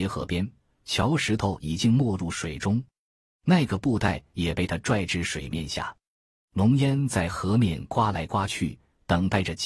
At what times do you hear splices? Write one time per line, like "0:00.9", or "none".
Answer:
none